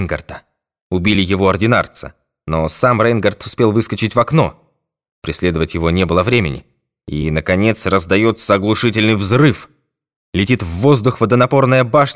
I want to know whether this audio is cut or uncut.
uncut